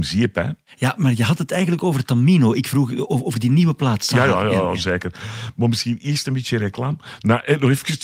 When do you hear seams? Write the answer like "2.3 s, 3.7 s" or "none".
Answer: 1.0 s